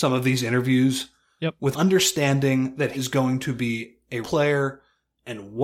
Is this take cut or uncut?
cut